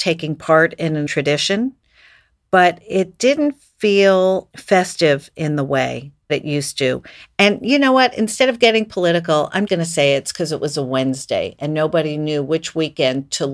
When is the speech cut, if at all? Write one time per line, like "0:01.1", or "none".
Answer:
0:01.1
0:04.5
0:06.3
0:09.7